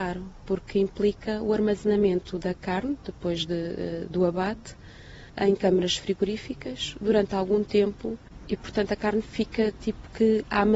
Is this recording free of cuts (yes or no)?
no